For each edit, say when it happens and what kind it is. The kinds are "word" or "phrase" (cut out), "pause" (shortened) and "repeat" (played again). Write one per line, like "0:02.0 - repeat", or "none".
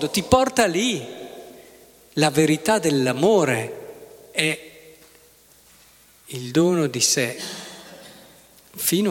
none